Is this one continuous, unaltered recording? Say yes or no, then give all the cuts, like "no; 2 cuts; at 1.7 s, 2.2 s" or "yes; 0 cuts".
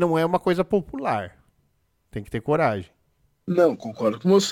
yes; 0 cuts